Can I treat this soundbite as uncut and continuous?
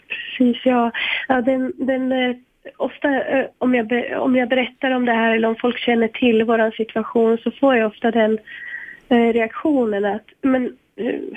yes; 0 cuts

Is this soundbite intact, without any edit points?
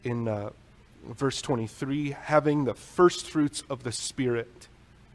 yes; 0 cuts

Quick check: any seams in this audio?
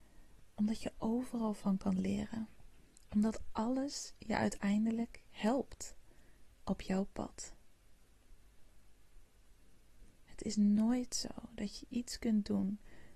no; 0 cuts

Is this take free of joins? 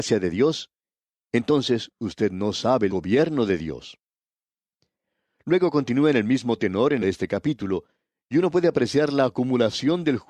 no; 2 cuts; at 2.9 s, 7.0 s

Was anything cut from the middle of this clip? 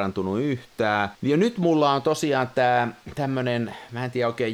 yes; 1 cut; at 1.1 s

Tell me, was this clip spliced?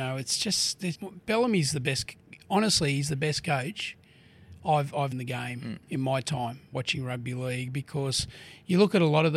yes; 3 cuts; at 0.9 s, 5.1 s, 6.7 s

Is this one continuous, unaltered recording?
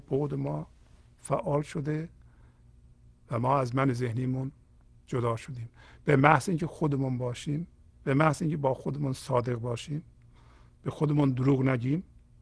yes; 0 cuts

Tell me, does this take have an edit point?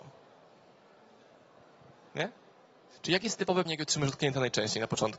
yes; 1 cut; at 3.7 s

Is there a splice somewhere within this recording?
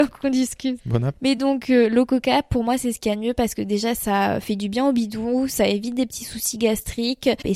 no; 0 cuts

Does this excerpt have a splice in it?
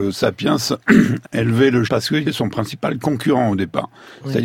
yes; 3 cuts; at 1.2 s, 1.8 s, 2.2 s

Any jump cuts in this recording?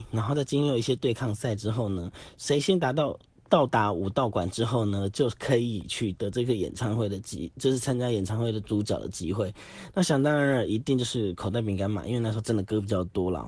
no; 0 cuts

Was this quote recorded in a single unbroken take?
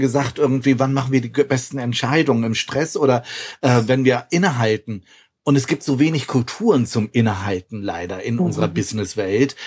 yes; 0 cuts

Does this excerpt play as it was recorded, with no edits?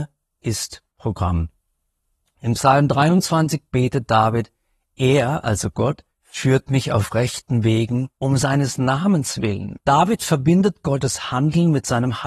no; 3 cuts; at 6.1 s, 8.1 s, 9.8 s

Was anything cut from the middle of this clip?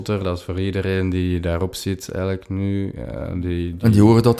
no; 0 cuts

